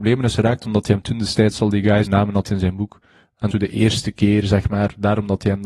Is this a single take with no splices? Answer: no; 3 cuts; at 2.1 s, 2.4 s, 3.5 s

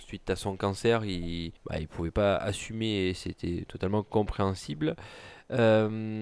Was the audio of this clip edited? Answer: yes; 1 cut; at 1.6 s

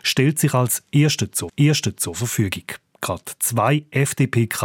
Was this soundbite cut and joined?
yes; 1 cut; at 1.5 s

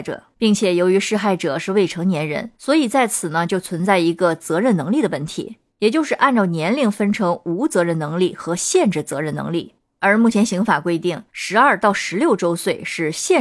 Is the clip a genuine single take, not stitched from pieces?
no; 2 cuts; at 2.5 s, 11.3 s

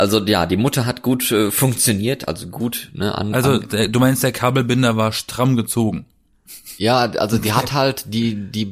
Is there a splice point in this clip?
no; 0 cuts

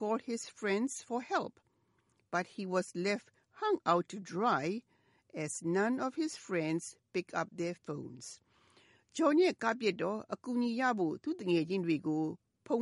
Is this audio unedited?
yes; 0 cuts

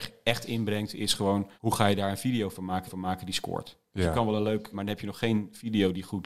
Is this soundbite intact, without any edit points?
no; 3 cuts; at 1.6 s, 2.9 s, 4.7 s

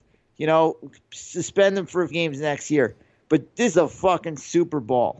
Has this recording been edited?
yes; 2 cuts; at 2.1 s, 3.7 s

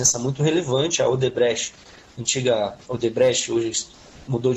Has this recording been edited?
no; 0 cuts

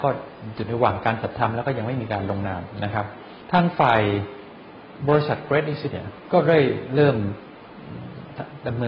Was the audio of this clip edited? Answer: yes; 1 cut; at 5.9 s

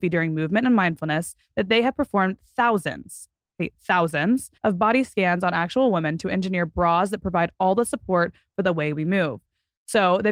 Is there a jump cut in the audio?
yes; 1 cut; at 4.6 s

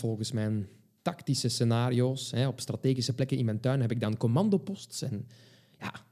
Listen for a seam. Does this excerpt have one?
no; 0 cuts

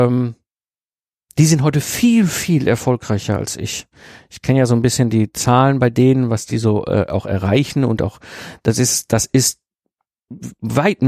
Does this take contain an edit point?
no; 0 cuts

